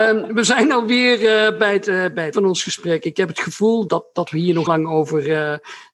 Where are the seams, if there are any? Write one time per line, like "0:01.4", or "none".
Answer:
0:02.3
0:03.9
0:04.7